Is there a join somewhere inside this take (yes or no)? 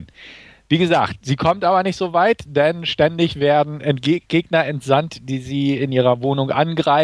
no